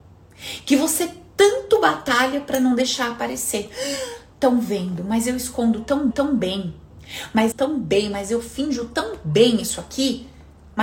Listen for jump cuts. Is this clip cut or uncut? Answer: cut